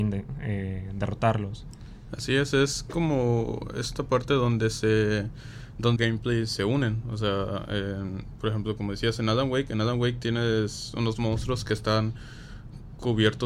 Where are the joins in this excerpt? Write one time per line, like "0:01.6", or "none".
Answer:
0:06.0